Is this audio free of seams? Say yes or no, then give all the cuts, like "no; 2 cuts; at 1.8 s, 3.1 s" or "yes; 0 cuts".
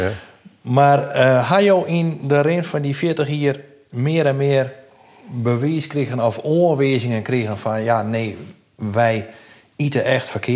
yes; 0 cuts